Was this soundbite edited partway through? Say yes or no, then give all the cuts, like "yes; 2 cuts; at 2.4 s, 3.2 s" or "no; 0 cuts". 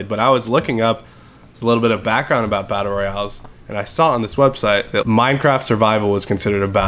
yes; 1 cut; at 5.0 s